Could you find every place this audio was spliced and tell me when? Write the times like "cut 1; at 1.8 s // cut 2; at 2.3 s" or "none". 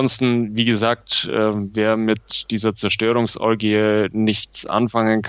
none

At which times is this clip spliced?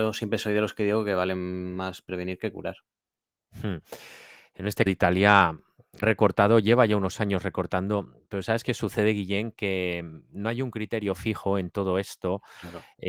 cut 1; at 4.9 s // cut 2; at 6.0 s

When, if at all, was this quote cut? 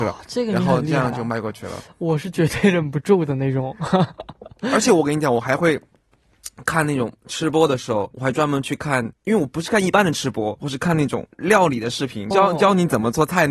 cut 1; at 8.1 s // cut 2; at 9.1 s // cut 3; at 10.6 s // cut 4; at 11.3 s // cut 5; at 12.3 s

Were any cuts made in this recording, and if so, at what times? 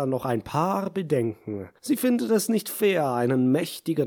cut 1; at 1.8 s

